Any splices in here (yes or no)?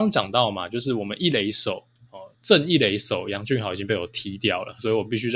no